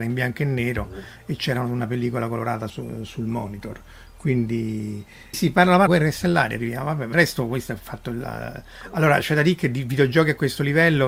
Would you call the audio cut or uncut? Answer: cut